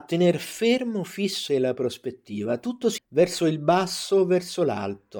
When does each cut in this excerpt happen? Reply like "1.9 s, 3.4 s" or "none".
1.5 s, 3.0 s